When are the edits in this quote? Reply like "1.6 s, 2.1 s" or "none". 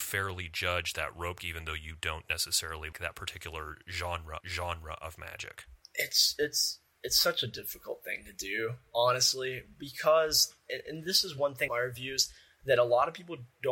1.4 s, 2.9 s, 4.4 s, 11.7 s